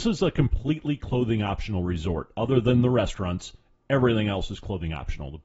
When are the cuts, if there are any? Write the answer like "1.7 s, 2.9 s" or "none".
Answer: none